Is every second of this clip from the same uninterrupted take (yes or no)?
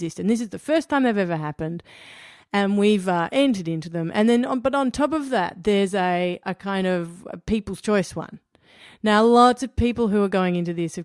no